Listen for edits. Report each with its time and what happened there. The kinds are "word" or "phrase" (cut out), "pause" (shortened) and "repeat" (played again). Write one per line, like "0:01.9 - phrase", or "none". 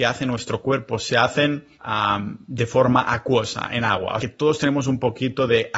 0:01.7 - pause
0:04.2 - word